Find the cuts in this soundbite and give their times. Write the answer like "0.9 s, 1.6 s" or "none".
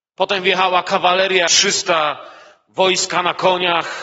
1.5 s